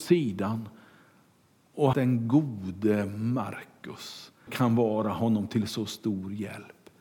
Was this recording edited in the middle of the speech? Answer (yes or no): yes